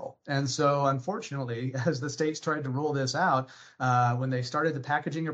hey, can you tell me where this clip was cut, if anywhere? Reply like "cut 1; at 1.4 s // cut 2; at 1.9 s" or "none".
none